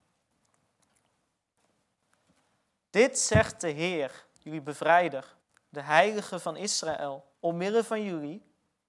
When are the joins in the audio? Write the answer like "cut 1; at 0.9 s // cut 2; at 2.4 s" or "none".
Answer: cut 1; at 4.3 s // cut 2; at 5.4 s // cut 3; at 7.3 s